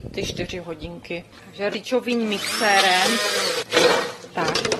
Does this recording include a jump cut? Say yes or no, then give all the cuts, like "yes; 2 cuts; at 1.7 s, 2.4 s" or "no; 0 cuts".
yes; 1 cut; at 1.7 s